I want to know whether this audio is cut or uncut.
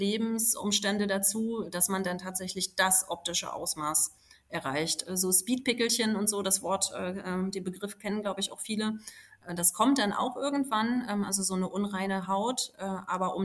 uncut